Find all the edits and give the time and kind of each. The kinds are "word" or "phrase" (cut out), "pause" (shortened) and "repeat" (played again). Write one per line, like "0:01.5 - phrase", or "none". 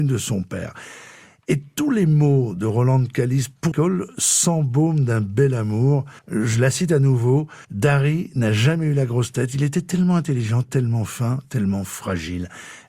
0:03.7 - word
0:06.2 - pause
0:07.6 - pause